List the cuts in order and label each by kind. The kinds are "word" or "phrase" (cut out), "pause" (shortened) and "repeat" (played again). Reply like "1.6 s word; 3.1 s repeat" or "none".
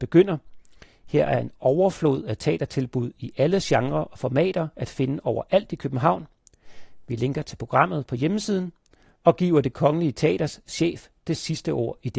none